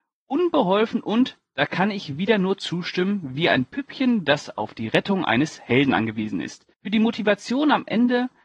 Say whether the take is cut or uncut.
cut